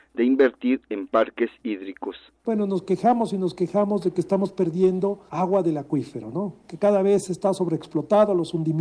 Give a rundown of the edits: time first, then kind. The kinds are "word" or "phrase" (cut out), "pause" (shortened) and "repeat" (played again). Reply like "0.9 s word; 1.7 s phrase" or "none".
none